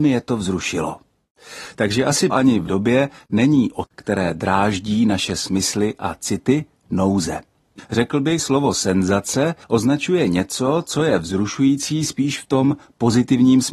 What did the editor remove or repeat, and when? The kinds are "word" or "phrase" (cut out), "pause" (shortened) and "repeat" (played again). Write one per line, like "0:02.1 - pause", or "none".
0:02.3 - word
0:02.7 - word
0:03.8 - word
0:07.8 - word
0:08.4 - word
0:09.6 - pause